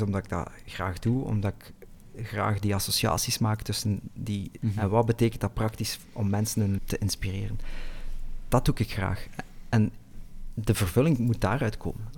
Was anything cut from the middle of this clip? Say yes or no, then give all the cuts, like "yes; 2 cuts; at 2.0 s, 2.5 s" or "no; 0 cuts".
yes; 2 cuts; at 4.6 s, 6.8 s